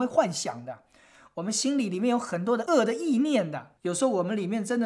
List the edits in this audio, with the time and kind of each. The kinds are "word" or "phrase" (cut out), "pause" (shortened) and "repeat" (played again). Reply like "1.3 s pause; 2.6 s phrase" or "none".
3.8 s pause